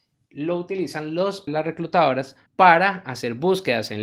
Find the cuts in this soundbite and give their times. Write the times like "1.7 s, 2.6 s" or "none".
1.5 s, 2.5 s